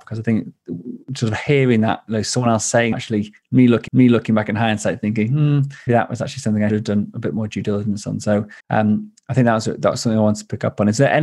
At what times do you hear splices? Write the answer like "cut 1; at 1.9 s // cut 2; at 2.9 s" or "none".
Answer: cut 1; at 1.0 s // cut 2; at 2.9 s // cut 3; at 3.9 s // cut 4; at 5.9 s // cut 5; at 6.7 s // cut 6; at 8.6 s